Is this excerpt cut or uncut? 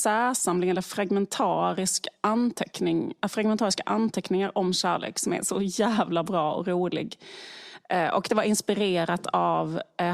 uncut